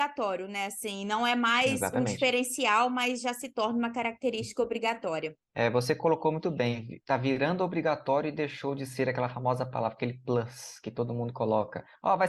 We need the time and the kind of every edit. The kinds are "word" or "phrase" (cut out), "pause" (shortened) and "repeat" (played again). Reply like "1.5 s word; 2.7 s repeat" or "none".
5.5 s pause